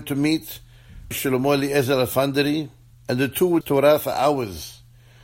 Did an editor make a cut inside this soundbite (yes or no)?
yes